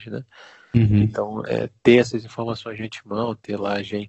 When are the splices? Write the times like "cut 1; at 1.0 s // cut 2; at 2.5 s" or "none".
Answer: none